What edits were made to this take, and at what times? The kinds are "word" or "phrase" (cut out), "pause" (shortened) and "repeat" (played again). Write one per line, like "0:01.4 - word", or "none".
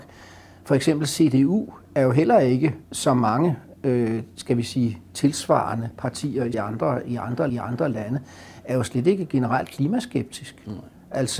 0:02.8 - pause
0:06.5 - word
0:07.5 - repeat